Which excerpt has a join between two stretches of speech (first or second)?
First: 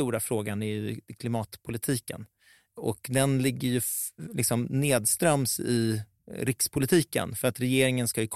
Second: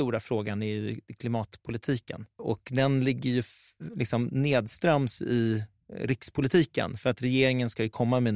second